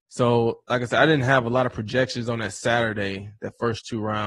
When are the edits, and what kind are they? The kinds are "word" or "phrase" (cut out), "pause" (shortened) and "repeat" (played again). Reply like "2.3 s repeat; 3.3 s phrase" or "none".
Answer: none